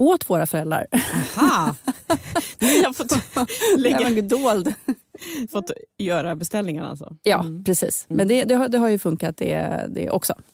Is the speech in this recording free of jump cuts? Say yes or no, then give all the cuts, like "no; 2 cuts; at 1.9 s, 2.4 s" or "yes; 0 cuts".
no; 2 cuts; at 5.5 s, 8.4 s